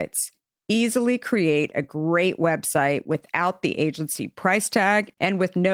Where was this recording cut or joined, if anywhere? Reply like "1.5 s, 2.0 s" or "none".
none